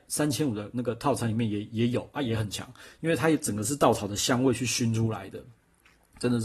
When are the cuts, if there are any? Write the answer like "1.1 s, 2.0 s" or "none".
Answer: none